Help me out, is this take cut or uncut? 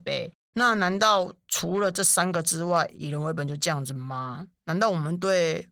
uncut